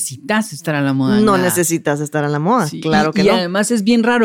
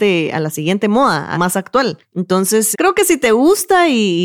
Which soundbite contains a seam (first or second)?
second